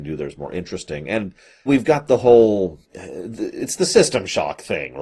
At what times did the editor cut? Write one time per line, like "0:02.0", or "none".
0:01.7
0:02.8